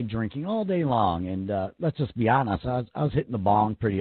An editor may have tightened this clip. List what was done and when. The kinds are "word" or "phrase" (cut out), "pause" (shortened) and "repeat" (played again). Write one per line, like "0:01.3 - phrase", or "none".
none